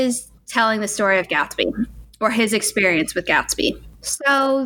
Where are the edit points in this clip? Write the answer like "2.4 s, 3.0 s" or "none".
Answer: none